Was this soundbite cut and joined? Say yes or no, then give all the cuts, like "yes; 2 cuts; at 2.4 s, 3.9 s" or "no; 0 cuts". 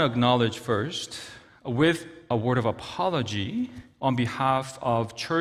no; 0 cuts